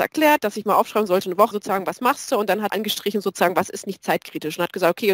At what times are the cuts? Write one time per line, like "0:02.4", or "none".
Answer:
0:01.5
0:02.7